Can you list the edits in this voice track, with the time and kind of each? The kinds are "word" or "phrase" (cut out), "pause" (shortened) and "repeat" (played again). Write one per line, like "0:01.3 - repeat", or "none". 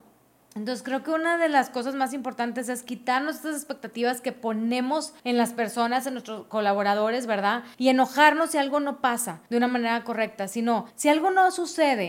0:05.2 - pause
0:07.7 - pause
0:09.5 - pause
0:10.9 - pause